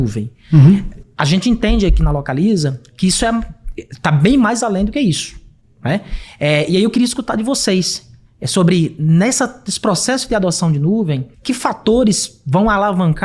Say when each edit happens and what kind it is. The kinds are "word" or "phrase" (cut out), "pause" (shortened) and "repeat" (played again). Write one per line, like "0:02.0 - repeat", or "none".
0:11.3 - pause